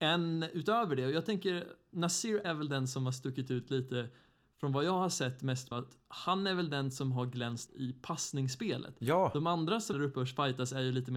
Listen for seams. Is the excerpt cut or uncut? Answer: cut